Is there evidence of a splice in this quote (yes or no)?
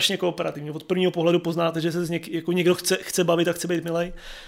no